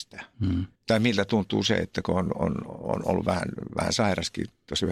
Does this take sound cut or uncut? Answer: uncut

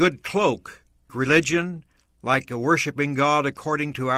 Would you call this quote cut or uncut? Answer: cut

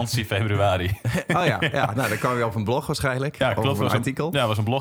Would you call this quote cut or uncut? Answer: uncut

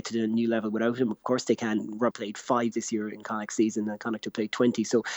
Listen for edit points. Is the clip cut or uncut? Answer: cut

